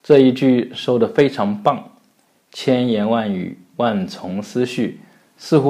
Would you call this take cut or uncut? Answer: uncut